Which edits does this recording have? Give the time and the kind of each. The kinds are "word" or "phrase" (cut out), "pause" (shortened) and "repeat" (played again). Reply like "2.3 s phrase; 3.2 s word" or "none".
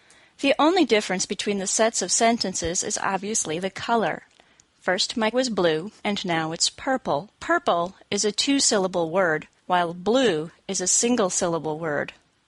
5.3 s word; 6.0 s pause; 7.3 s pause; 9.6 s pause